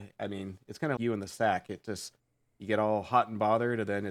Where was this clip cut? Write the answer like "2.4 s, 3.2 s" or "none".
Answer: 1.0 s